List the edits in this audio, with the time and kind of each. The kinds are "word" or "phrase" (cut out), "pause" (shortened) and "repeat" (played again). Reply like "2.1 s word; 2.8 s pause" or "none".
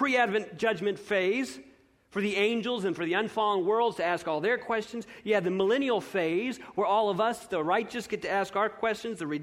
none